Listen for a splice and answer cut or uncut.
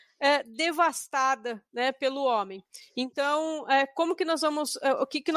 uncut